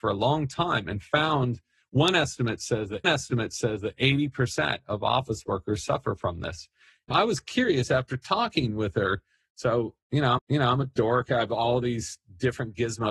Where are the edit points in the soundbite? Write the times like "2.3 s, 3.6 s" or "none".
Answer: 3.0 s, 7.1 s, 10.4 s